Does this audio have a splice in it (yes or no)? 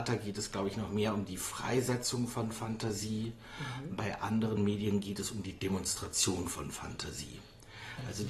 no